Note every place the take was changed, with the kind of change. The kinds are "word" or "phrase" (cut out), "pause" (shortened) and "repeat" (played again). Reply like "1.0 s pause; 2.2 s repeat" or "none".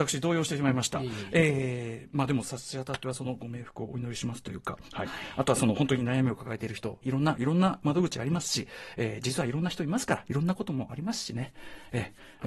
7.0 s word